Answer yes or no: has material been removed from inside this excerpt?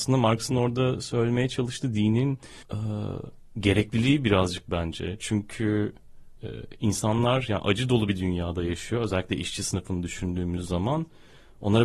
yes